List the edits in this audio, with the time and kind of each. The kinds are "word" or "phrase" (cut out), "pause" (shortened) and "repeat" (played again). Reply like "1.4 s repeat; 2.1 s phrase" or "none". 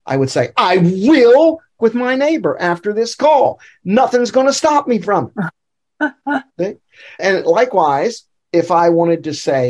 1.8 s word; 7.2 s word; 8.4 s pause